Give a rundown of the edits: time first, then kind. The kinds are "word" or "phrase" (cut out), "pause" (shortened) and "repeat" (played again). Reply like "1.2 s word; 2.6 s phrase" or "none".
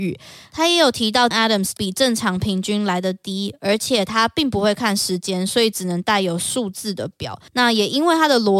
1.3 s word; 1.8 s word; 7.5 s pause